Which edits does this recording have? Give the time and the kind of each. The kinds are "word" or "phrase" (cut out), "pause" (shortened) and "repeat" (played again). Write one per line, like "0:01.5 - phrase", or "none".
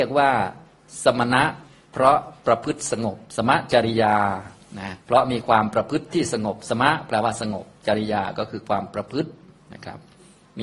0:05.0 - pause